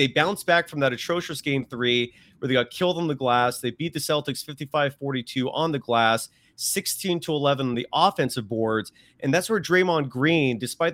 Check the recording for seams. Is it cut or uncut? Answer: uncut